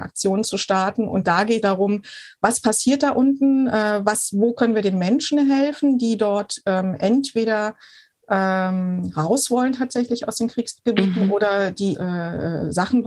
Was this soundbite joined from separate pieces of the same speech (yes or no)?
yes